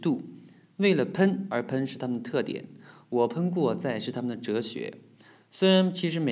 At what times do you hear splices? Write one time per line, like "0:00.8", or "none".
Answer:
none